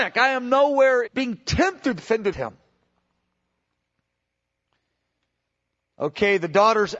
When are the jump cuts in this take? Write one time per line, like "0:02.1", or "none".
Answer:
0:01.1
0:02.0
0:02.3